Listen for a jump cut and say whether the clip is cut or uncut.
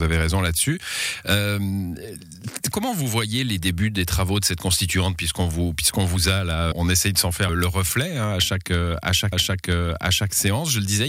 cut